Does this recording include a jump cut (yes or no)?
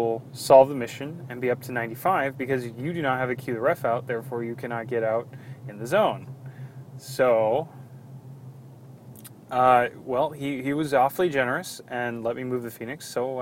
no